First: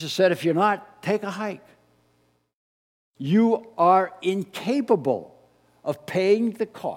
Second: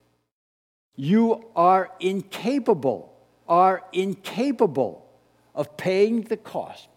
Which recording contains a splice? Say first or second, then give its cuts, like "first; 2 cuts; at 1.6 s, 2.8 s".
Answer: second; 1 cut; at 3.5 s